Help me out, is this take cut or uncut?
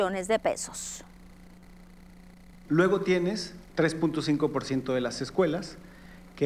cut